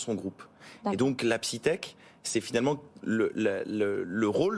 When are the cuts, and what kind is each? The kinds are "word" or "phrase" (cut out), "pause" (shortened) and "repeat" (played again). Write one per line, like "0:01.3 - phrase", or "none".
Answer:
none